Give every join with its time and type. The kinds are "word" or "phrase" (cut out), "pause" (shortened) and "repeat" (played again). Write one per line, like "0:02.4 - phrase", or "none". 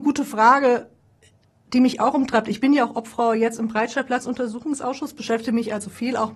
none